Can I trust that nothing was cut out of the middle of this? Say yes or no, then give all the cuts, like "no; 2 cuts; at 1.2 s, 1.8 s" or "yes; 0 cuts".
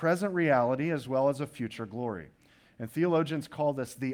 yes; 0 cuts